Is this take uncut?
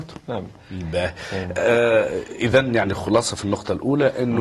yes; 0 cuts

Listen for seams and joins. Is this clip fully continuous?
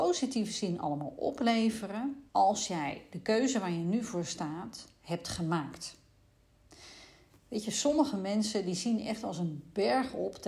no; 1 cut; at 2.3 s

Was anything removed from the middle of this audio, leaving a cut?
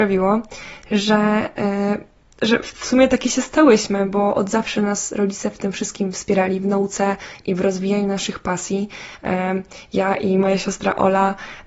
no; 0 cuts

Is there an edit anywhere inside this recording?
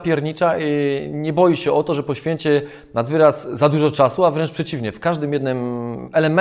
no; 0 cuts

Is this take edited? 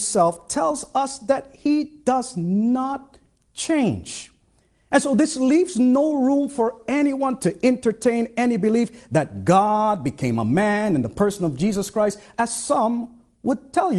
no; 0 cuts

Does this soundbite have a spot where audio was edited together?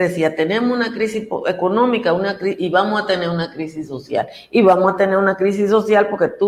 no; 0 cuts

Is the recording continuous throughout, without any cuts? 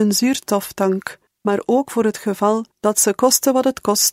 no; 2 cuts; at 1.3 s, 2.7 s

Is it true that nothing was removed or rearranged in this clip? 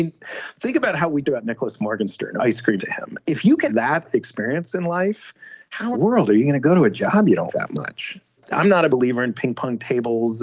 no; 8 cuts; at 1.2 s, 2.4 s, 2.8 s, 3.7 s, 5.9 s, 7.5 s, 8.4 s, 8.9 s

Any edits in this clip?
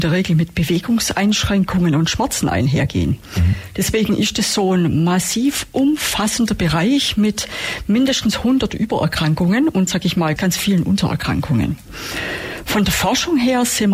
yes; 2 cuts; at 9.9 s, 10.4 s

